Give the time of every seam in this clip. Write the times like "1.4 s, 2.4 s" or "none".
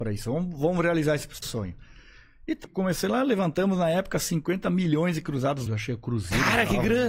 1.4 s, 2.6 s, 5.7 s